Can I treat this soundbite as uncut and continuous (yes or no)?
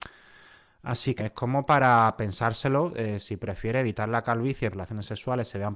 no